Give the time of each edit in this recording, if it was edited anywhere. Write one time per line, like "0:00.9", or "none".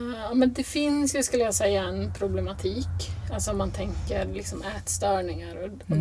none